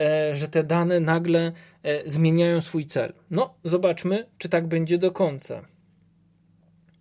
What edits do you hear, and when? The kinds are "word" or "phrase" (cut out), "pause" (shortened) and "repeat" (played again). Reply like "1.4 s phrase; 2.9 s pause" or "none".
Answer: none